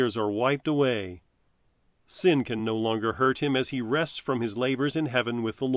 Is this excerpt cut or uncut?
uncut